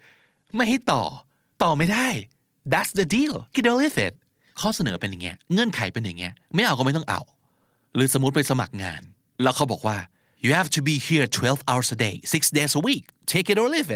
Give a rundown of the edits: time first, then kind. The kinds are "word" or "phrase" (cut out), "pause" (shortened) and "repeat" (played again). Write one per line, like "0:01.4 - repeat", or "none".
0:03.5 - word

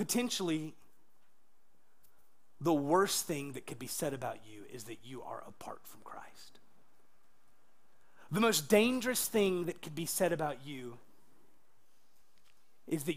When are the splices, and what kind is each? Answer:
none

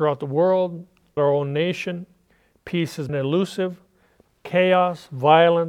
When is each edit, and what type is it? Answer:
0:01.2 - word
0:03.1 - word

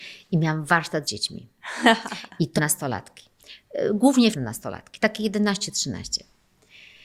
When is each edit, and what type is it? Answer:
0:01.0 - phrase
0:02.6 - word
0:04.3 - word

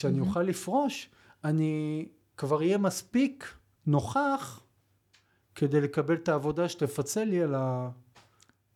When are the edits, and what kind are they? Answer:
none

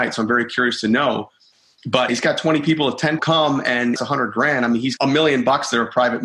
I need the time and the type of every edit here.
0:02.1 - word
0:03.2 - word
0:04.0 - word
0:05.0 - word

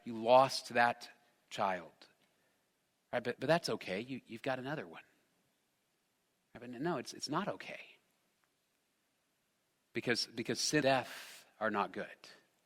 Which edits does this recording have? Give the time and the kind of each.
0:10.8 - word

